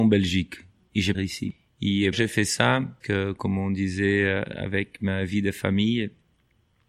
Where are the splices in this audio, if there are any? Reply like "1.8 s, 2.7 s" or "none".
1.1 s, 2.1 s, 3.0 s